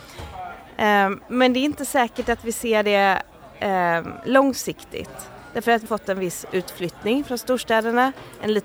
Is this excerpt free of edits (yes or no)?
no